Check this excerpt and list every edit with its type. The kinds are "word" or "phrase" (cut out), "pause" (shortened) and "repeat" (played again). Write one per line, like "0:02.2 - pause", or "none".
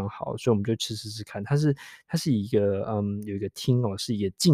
none